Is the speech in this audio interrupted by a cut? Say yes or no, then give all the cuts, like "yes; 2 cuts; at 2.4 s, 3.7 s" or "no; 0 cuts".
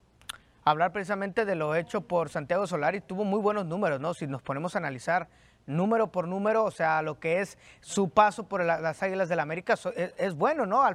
no; 0 cuts